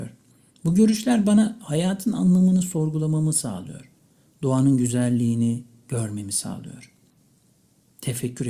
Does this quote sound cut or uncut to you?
uncut